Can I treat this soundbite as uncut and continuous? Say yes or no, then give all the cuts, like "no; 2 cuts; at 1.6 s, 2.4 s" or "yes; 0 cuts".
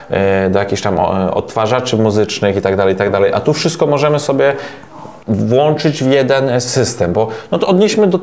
no; 1 cut; at 5.2 s